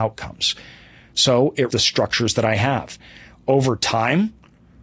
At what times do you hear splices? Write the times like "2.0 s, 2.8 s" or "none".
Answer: 1.7 s